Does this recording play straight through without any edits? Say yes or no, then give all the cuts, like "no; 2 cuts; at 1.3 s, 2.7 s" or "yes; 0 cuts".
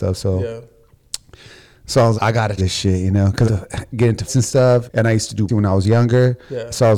no; 6 cuts; at 2.2 s, 2.6 s, 3.5 s, 4.3 s, 4.9 s, 5.5 s